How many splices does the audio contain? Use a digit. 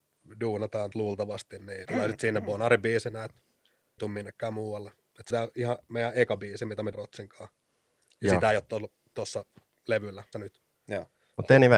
6